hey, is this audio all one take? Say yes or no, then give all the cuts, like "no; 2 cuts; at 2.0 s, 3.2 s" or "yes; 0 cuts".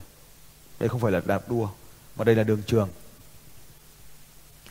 yes; 0 cuts